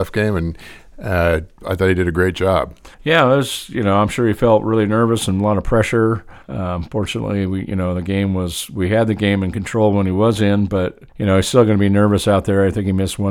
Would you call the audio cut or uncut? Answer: cut